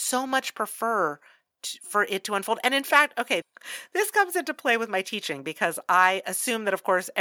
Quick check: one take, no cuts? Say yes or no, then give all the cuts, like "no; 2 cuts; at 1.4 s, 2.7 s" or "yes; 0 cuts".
no; 1 cut; at 3.4 s